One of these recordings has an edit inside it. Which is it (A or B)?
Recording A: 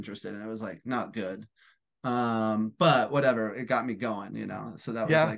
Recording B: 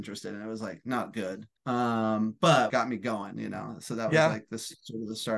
B